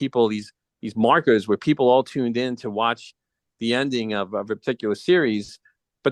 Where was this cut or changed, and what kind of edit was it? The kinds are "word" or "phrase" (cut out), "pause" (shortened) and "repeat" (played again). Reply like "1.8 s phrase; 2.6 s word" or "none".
none